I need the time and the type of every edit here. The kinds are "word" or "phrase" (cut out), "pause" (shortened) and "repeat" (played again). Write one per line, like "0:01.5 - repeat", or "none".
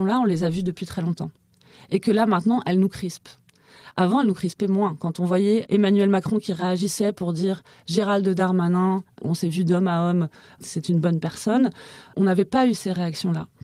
none